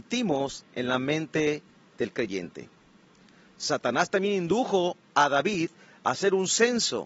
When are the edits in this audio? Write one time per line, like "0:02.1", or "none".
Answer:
none